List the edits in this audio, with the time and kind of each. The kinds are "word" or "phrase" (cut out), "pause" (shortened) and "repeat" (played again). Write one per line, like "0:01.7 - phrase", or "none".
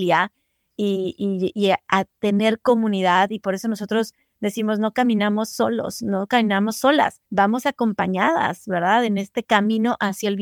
0:07.3 - pause